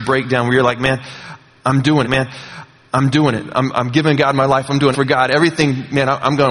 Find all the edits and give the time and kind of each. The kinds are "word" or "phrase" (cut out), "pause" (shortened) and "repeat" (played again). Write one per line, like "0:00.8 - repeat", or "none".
0:02.0 - repeat
0:04.9 - word